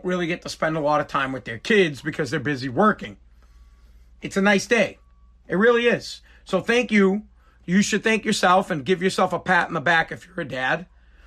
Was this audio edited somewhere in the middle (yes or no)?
no